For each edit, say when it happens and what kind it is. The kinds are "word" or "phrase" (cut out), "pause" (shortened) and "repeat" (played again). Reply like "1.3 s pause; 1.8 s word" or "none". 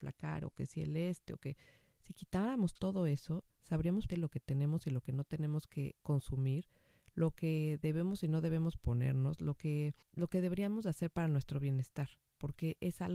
4.1 s word; 6.0 s pause; 10.0 s pause